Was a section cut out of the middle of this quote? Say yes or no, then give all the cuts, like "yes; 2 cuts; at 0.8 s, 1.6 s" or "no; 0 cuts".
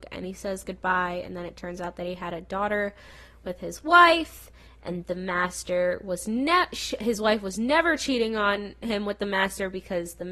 no; 0 cuts